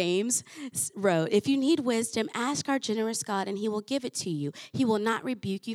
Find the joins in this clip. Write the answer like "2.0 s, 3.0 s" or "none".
none